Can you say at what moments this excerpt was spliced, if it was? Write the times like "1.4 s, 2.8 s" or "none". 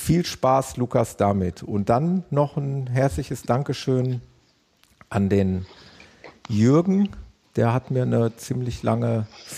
none